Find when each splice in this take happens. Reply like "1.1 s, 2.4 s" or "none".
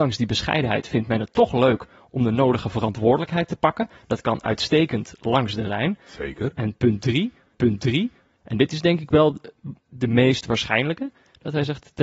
7.5 s, 9.8 s